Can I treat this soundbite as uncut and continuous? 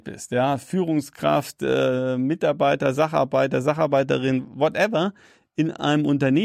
yes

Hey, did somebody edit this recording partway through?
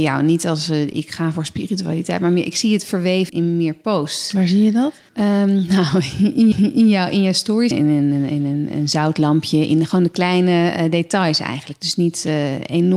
yes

